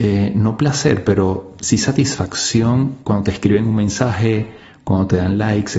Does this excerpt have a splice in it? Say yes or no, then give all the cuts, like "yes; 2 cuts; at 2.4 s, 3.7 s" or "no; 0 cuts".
no; 0 cuts